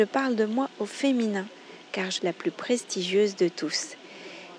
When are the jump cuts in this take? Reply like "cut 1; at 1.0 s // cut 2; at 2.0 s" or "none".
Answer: cut 1; at 2.2 s